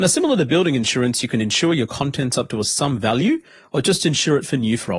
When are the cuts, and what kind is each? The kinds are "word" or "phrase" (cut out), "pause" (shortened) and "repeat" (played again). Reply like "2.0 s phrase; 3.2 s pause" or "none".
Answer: none